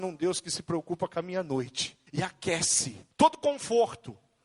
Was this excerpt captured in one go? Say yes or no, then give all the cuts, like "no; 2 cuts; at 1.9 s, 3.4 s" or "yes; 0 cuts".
no; 2 cuts; at 2.1 s, 3.1 s